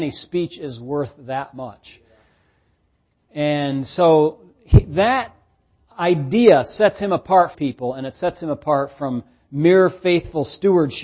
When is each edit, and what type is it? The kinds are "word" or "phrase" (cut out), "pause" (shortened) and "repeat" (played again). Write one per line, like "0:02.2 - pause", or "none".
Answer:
0:07.5 - phrase